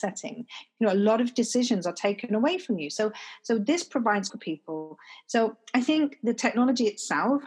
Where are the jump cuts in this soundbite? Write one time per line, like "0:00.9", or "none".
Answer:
0:04.3